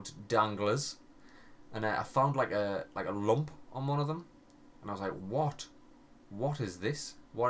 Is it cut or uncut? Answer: uncut